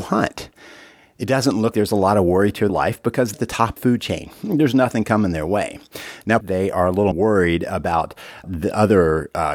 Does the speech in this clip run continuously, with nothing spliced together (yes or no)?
no